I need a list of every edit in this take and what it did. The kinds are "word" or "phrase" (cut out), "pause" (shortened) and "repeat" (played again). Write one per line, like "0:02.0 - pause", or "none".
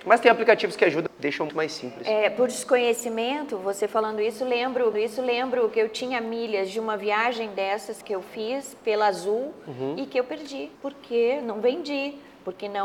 0:01.1 - word
0:01.5 - word
0:04.9 - repeat
0:08.0 - word
0:10.7 - pause